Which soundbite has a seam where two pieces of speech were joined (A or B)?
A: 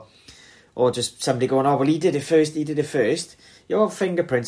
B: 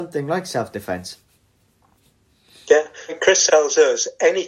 B